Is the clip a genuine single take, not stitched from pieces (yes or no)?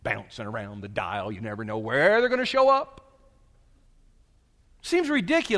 yes